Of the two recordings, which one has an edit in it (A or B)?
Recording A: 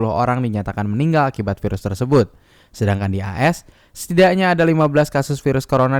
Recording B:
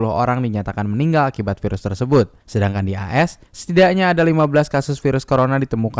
B